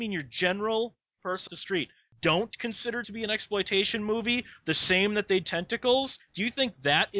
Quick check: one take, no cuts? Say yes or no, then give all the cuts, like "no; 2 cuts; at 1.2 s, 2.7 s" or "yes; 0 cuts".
no; 3 cuts; at 1.5 s, 3.0 s, 5.4 s